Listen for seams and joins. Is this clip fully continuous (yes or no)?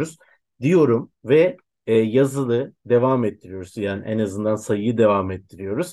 yes